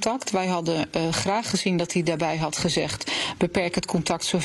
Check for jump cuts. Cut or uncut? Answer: uncut